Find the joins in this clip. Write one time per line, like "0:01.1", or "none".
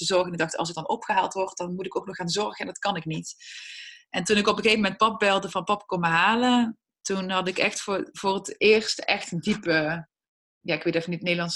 none